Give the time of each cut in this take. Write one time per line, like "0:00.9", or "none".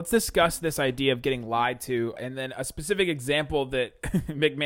0:02.2